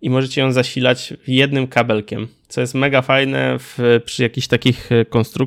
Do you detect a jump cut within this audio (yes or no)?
no